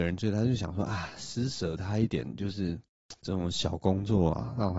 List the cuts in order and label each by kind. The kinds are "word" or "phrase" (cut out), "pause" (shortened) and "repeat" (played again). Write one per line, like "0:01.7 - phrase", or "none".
0:03.2 - pause